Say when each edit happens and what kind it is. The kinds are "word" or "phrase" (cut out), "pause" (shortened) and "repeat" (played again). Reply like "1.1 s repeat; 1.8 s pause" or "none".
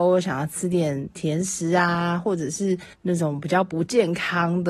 2.9 s pause